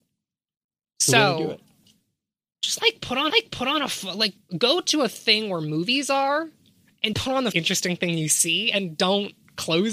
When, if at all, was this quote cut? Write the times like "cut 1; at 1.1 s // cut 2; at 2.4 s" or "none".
cut 1; at 3.3 s // cut 2; at 4.4 s // cut 3; at 7.1 s // cut 4; at 7.5 s